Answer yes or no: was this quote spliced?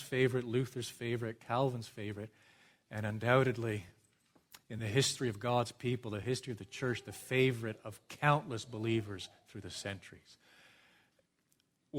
no